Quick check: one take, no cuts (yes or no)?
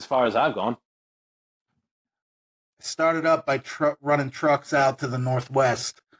yes